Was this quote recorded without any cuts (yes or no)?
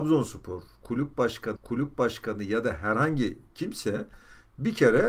no